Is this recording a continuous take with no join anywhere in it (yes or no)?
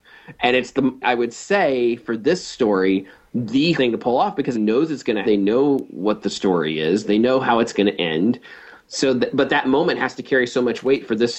no